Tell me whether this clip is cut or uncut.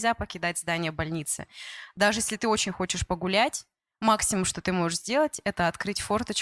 uncut